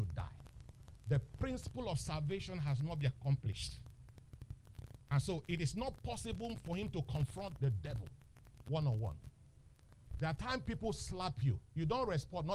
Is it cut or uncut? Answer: uncut